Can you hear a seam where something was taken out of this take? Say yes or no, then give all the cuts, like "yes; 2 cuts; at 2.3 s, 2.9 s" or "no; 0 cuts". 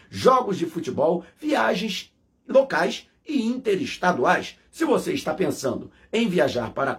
no; 0 cuts